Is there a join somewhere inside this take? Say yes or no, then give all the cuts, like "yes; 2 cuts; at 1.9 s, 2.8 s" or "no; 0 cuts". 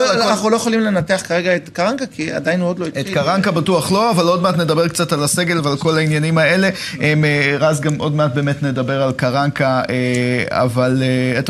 no; 0 cuts